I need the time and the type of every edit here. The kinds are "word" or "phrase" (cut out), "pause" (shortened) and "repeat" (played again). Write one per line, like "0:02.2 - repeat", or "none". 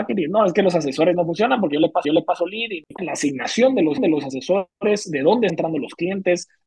0:02.0 - repeat
0:04.0 - repeat
0:05.5 - word

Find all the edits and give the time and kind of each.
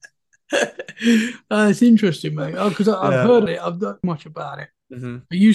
0:03.5 - word
0:04.0 - phrase

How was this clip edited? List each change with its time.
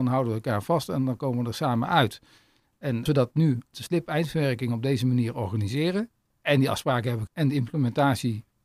0:03.1 - word
0:03.7 - word
0:06.2 - pause
0:07.3 - word

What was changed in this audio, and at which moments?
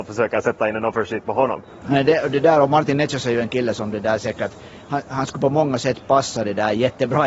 none

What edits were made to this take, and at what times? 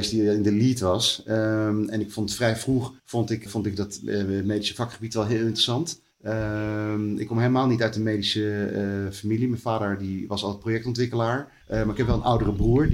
0:03.0 - pause
0:03.5 - word
0:06.1 - pause
0:11.6 - pause

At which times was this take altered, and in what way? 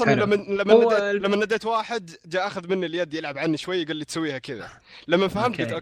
none

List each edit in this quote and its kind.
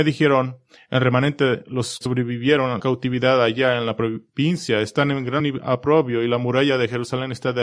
0:02.0 - word
0:02.8 - word
0:05.4 - word

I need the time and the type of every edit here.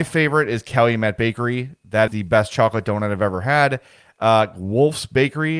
0:02.1 - word

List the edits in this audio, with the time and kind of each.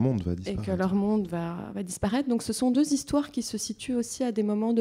none

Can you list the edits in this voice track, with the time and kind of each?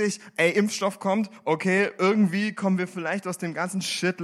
none

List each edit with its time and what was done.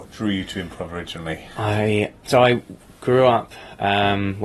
0:02.2 - word

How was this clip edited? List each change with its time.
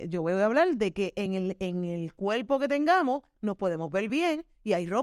none

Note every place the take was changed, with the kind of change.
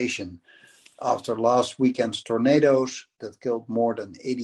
none

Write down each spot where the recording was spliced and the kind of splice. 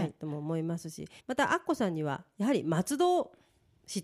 0:01.2 - pause

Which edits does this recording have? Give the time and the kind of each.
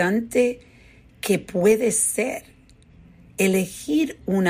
none

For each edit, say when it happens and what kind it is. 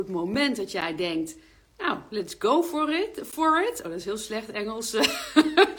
none

